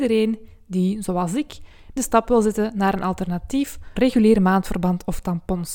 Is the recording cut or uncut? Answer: cut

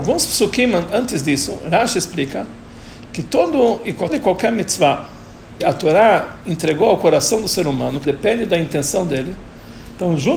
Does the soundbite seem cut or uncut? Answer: cut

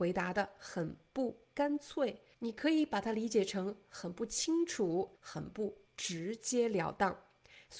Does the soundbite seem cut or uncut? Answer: cut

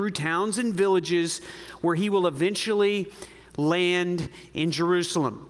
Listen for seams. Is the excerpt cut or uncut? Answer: uncut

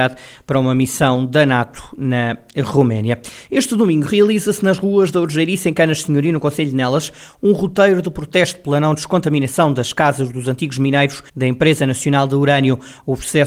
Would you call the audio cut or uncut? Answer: cut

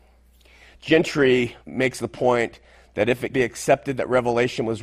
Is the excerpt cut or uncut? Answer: cut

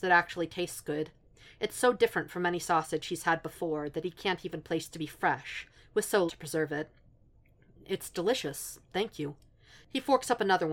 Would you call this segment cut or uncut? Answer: cut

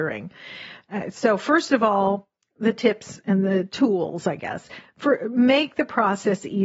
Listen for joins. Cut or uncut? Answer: uncut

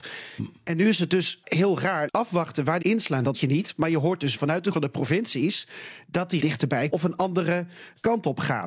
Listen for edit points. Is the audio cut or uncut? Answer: cut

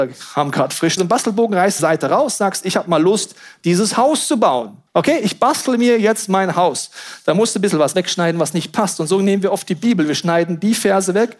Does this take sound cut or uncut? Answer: cut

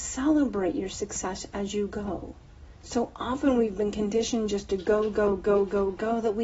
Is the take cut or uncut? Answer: uncut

